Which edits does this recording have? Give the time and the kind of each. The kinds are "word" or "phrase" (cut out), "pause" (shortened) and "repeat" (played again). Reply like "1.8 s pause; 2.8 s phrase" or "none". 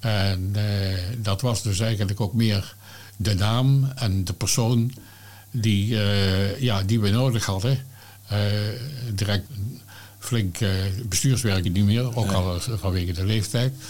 9.5 s word; 11.6 s phrase